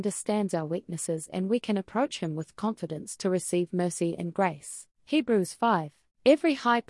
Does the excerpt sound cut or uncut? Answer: uncut